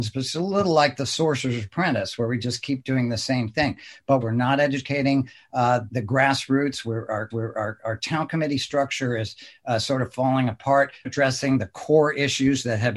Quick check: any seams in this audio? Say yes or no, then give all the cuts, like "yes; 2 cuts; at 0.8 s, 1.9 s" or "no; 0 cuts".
yes; 4 cuts; at 4.2 s, 5.9 s, 7.3 s, 11.0 s